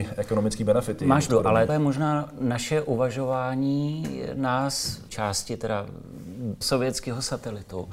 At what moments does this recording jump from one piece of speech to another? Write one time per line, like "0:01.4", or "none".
0:01.3
0:01.7
0:05.1
0:06.6